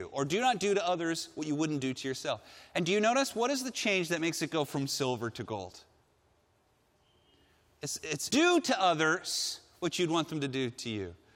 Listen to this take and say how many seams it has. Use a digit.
1